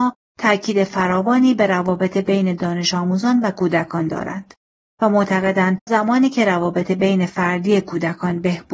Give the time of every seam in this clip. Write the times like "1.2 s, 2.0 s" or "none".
5.9 s